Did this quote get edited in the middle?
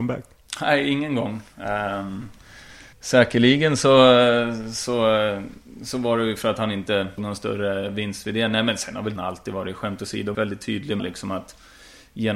yes; 5 cuts; at 2.9 s, 7.2 s, 9.2 s, 10.3 s, 11.0 s

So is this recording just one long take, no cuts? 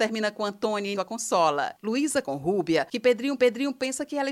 no; 3 cuts; at 0.9 s, 2.2 s, 3.4 s

